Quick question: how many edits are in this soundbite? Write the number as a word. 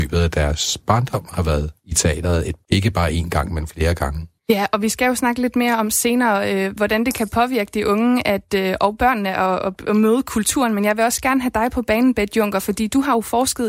three